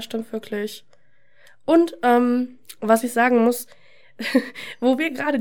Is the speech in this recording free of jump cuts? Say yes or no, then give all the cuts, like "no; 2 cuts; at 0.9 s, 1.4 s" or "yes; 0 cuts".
yes; 0 cuts